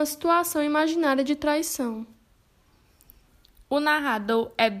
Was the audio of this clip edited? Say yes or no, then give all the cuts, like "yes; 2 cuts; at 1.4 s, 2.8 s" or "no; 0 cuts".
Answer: no; 0 cuts